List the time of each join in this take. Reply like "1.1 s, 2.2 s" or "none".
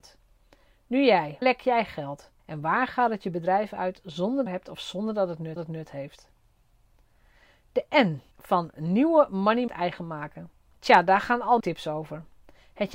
1.4 s, 2.4 s, 4.5 s, 5.6 s, 8.3 s, 9.7 s, 10.7 s, 11.6 s